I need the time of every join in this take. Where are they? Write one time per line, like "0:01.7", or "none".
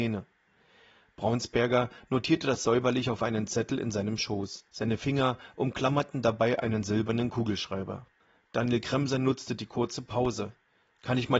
0:04.7
0:08.2